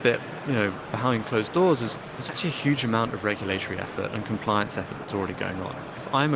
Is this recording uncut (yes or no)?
yes